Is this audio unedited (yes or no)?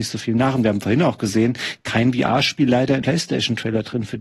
no